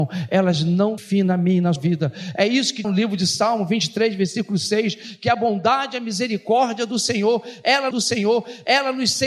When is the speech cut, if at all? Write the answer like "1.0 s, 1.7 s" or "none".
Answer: 1.0 s, 1.8 s, 2.8 s, 7.9 s